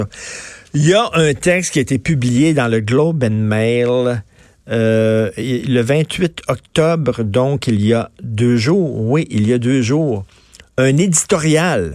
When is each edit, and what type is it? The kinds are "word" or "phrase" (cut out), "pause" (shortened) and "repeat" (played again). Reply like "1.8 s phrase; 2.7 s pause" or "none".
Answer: none